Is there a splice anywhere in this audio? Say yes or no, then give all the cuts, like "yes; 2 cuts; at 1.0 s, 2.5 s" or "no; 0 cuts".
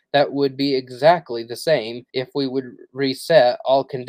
yes; 1 cut; at 2.1 s